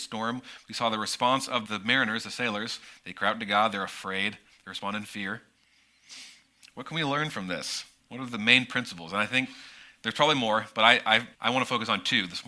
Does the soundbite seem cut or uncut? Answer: cut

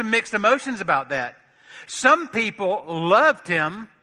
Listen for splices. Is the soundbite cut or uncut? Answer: uncut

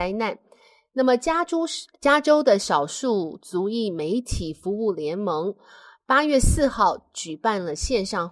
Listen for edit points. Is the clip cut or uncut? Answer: uncut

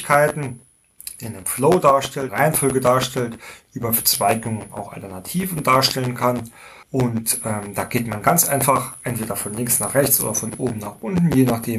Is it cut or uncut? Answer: cut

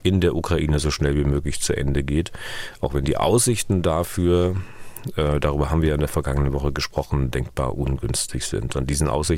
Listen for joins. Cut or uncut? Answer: uncut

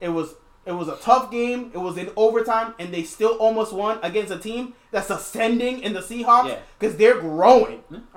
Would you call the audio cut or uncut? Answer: uncut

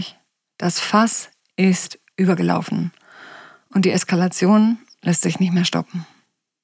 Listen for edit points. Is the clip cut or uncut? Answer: uncut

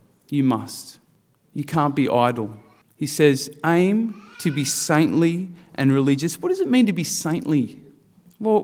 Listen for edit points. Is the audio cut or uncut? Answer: uncut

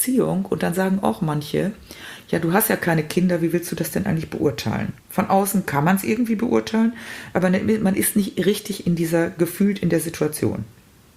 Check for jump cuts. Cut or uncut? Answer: cut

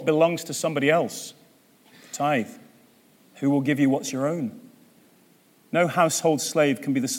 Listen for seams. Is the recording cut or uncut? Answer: uncut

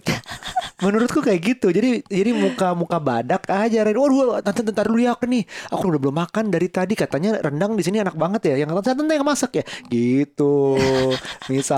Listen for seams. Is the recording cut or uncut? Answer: cut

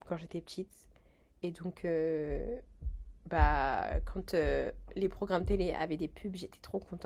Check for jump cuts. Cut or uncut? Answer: uncut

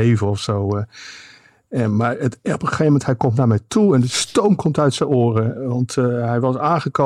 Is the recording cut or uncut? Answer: uncut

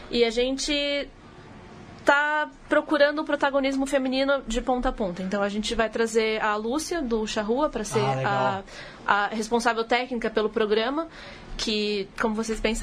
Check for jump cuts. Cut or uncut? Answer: uncut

